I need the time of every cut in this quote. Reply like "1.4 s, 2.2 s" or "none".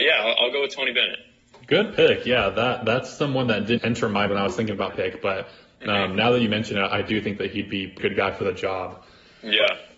3.8 s, 4.3 s, 4.9 s, 8.0 s